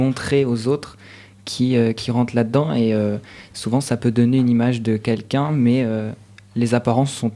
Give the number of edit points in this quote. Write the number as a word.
zero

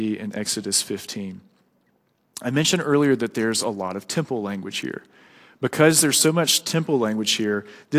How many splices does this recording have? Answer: zero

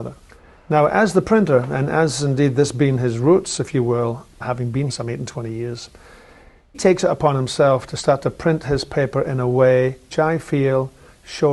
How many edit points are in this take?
four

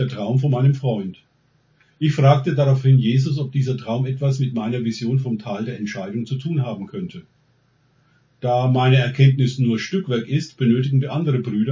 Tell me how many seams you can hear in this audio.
zero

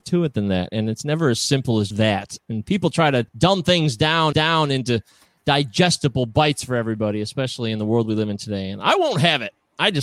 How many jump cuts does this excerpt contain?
three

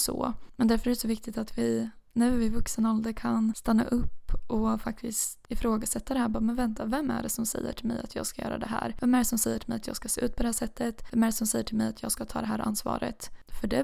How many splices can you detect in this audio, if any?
zero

